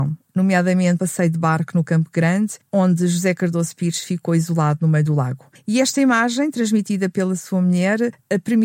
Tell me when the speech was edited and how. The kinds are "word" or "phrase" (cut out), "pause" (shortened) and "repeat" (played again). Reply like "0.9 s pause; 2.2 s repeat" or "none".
1.0 s word